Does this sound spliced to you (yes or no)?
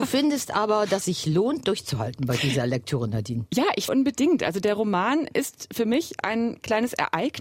yes